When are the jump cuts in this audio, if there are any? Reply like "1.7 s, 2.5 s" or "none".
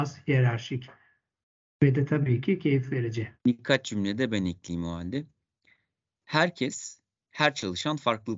3.4 s